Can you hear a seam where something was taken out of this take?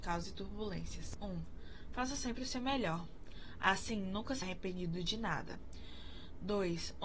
yes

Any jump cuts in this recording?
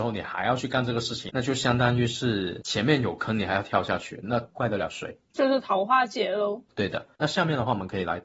no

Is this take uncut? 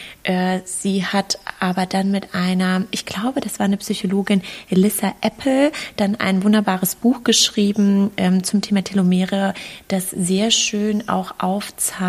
yes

